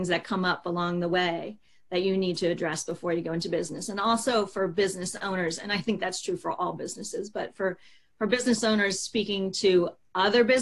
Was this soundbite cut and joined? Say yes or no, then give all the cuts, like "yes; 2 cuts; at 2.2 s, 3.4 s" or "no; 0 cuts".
no; 0 cuts